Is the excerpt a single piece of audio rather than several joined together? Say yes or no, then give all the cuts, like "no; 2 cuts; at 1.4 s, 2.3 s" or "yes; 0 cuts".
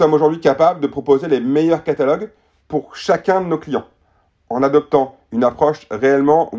yes; 0 cuts